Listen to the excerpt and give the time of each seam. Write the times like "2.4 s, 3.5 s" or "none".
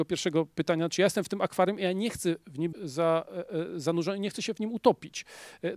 2.7 s